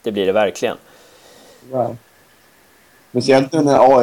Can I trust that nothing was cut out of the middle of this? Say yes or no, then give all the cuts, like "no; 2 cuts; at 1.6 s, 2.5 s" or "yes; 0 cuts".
yes; 0 cuts